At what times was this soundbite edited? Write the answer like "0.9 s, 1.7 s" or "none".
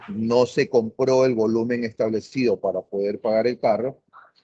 none